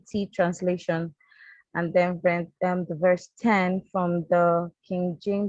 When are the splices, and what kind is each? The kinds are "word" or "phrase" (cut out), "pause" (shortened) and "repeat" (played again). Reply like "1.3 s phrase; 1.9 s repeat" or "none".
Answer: none